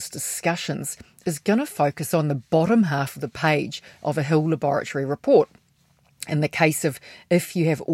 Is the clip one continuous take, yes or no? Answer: yes